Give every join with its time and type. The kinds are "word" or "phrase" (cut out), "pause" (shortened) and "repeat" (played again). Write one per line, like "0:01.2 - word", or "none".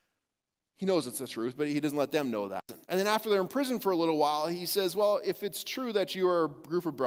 0:02.8 - pause

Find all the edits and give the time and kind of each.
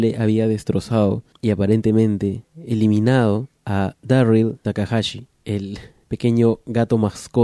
none

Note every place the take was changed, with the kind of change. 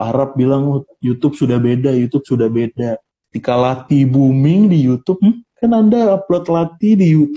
0:03.1 - pause

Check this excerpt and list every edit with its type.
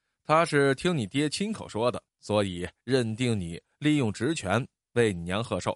0:02.1 - pause

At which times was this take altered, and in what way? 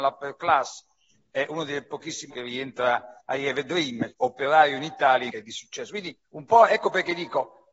0:02.3 - word
0:03.2 - pause
0:04.1 - word
0:05.3 - phrase
0:06.2 - pause

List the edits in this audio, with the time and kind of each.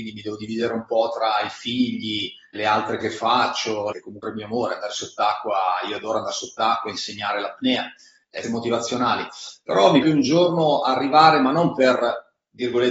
0:02.5 - word
0:03.0 - word
0:03.9 - word
0:04.2 - word
0:08.4 - word
0:10.0 - word

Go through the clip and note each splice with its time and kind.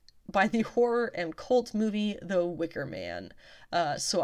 none

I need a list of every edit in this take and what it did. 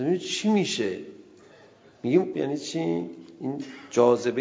0:02.3 - phrase

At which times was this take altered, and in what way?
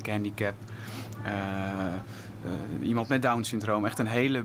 none

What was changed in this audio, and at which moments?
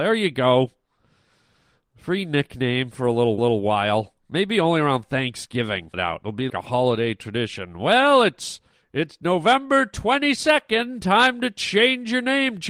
0:03.4 - repeat
0:05.9 - phrase
0:06.5 - word
0:08.7 - pause

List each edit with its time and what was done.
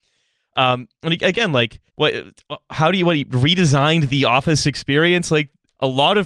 0:01.9 - pause

